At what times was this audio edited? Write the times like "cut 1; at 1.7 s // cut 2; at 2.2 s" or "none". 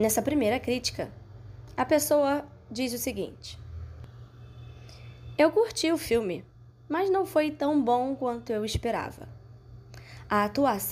none